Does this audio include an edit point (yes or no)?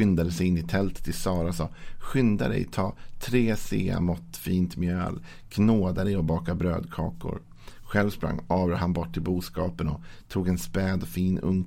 no